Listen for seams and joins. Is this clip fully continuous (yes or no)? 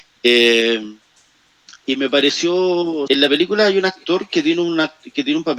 no